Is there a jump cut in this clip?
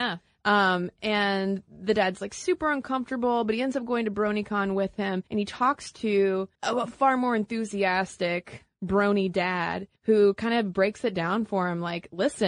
yes; 3 cuts; at 5.3 s, 6.6 s, 10.0 s

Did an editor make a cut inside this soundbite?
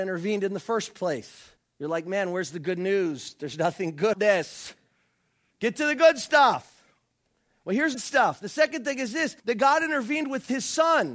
yes; 4 cuts; at 1.6 s, 4.1 s, 7.9 s, 9.4 s

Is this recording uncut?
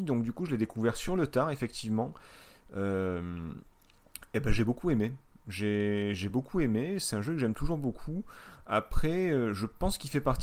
yes; 0 cuts

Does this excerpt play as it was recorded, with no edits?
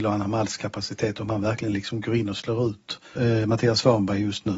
no; 1 cut; at 3.2 s

